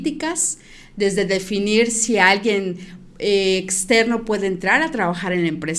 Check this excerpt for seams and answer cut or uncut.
uncut